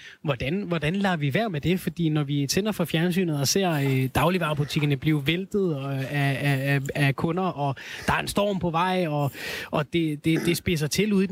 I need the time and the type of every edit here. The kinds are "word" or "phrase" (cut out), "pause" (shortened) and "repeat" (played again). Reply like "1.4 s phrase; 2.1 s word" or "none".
none